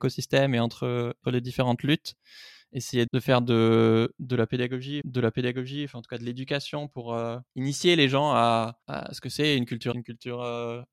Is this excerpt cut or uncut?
cut